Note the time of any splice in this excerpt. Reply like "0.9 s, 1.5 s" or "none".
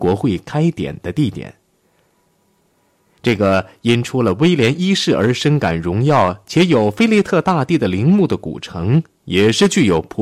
none